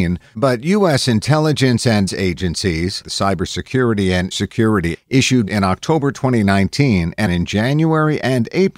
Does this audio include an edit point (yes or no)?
yes